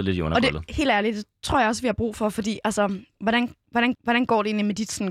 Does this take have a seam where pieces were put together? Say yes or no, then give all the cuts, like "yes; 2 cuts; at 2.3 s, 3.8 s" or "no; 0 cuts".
yes; 1 cut; at 3.9 s